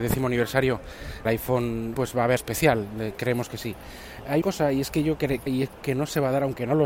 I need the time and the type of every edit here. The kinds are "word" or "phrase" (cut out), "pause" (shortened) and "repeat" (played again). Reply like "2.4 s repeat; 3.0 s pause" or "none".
1.3 s word; 1.9 s word; 2.4 s word; 4.4 s word; 5.5 s word; 5.8 s word

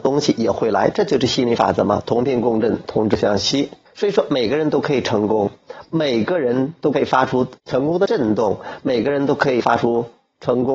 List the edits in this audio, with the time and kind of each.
3.9 s pause; 7.6 s pause

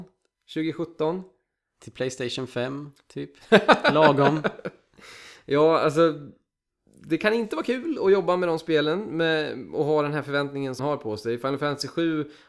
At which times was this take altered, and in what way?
10.8 s word

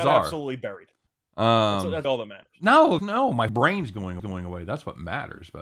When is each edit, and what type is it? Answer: 1.1 s pause; 2.0 s word; 3.0 s word; 3.5 s word; 4.2 s repeat

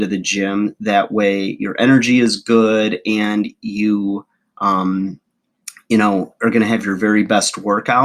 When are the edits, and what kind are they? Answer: none

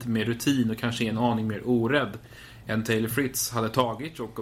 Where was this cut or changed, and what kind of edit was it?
none

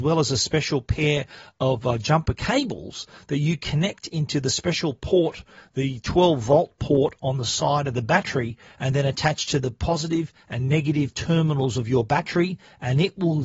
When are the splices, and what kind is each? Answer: none

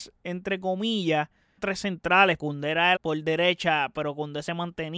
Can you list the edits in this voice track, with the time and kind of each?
1.6 s word; 2.4 s word; 3.0 s word

